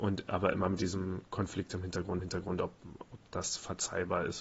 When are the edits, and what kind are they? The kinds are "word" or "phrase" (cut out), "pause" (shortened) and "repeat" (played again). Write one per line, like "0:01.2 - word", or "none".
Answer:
0:02.2 - repeat